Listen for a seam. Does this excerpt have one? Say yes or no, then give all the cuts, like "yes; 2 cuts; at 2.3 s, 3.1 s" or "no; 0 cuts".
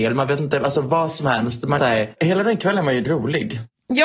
yes; 2 cuts; at 1.8 s, 3.0 s